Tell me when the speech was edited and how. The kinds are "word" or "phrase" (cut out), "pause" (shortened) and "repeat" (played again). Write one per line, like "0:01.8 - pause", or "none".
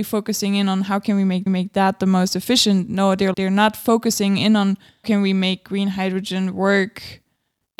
0:01.5 - repeat
0:03.3 - word
0:05.0 - word

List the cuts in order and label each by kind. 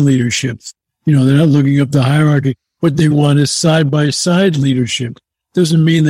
0:03.1 - word

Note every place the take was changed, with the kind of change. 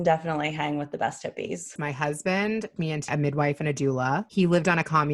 0:02.8 - word
0:03.1 - word

